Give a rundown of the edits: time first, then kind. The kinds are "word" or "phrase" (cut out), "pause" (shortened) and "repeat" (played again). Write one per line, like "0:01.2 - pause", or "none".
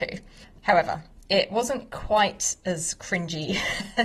none